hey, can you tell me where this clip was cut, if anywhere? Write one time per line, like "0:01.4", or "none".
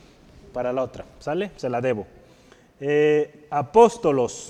none